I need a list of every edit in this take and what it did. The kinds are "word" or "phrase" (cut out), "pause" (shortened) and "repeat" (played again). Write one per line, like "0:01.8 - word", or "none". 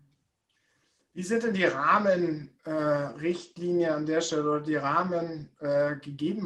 none